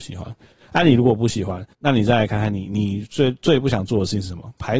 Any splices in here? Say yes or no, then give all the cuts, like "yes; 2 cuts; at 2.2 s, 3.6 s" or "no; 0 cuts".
yes; 1 cut; at 1.7 s